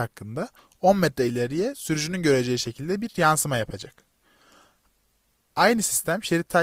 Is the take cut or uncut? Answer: uncut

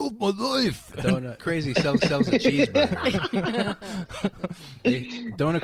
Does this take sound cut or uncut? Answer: cut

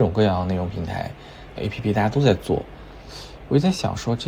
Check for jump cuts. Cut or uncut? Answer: cut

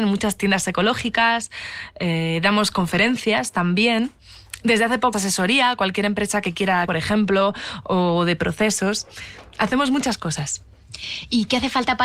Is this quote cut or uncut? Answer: cut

